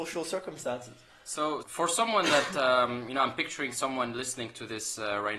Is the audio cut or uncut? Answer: cut